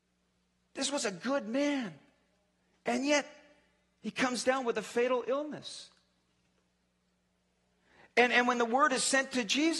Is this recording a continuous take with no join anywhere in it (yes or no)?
yes